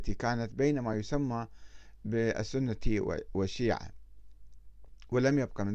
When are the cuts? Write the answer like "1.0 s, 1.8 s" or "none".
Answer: none